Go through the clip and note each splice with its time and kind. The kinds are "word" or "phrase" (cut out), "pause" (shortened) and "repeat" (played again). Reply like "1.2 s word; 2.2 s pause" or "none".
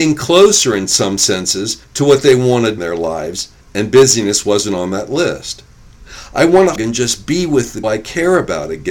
1.8 s pause; 2.8 s phrase; 3.6 s pause; 6.8 s word; 7.8 s word